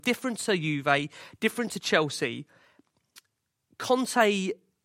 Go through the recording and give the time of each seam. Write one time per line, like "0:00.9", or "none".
none